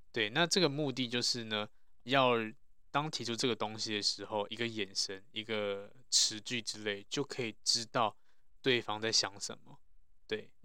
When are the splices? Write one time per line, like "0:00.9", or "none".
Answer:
0:02.0